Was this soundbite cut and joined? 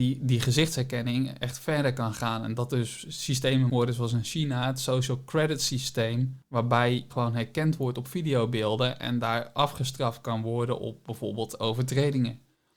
yes; 2 cuts; at 3.7 s, 7.1 s

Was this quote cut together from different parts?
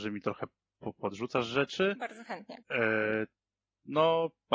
yes; 1 cut; at 2.6 s

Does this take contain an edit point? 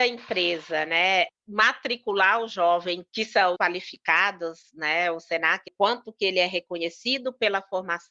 yes; 3 cuts; at 3.1 s, 3.5 s, 5.7 s

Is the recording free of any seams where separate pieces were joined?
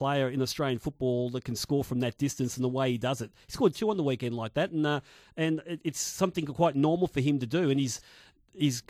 yes; 0 cuts

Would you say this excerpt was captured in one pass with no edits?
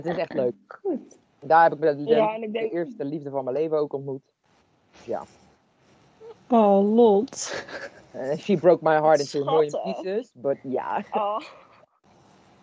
yes; 0 cuts

